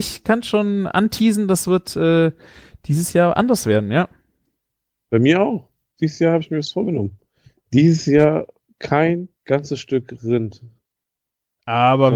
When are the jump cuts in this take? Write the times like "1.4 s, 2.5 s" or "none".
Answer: 9.4 s